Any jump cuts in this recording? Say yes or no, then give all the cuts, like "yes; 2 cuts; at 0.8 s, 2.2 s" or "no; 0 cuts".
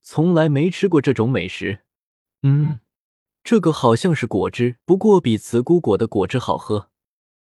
yes; 1 cut; at 4.8 s